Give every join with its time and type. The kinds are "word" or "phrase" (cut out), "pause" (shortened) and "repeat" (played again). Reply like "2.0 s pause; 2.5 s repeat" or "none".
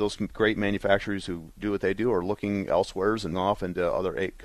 3.3 s word